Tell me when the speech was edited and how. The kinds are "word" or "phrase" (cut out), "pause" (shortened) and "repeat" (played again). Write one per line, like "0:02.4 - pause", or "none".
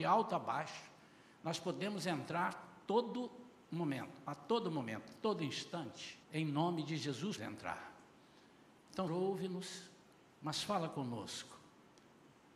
0:06.2 - pause
0:07.4 - word
0:09.1 - word

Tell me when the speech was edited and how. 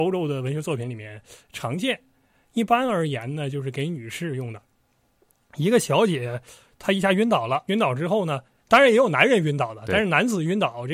0:07.7 - word

